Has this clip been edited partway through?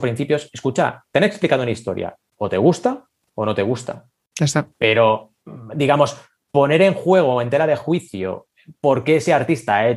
no; 0 cuts

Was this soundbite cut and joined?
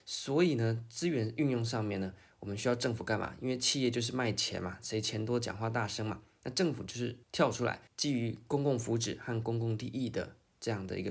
yes; 2 cuts; at 7.2 s, 7.9 s

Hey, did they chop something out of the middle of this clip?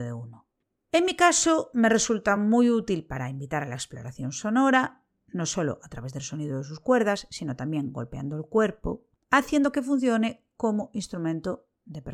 no; 0 cuts

